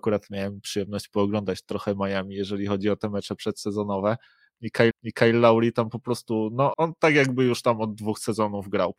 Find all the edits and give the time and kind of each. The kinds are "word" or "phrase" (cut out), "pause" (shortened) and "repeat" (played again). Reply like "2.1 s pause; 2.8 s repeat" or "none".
4.9 s repeat; 6.7 s word